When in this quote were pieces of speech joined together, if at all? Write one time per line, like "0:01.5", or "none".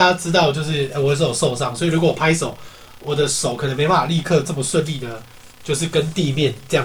0:05.5